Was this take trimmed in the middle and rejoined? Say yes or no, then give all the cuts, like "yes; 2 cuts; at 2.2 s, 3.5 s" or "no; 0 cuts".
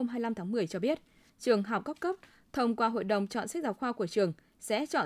no; 0 cuts